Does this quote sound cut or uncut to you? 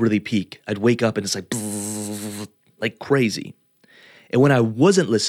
uncut